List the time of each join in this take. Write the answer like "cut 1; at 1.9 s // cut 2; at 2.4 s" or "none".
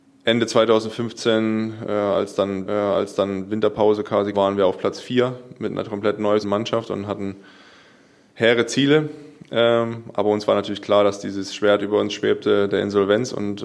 cut 1; at 2.7 s // cut 2; at 4.3 s // cut 3; at 6.4 s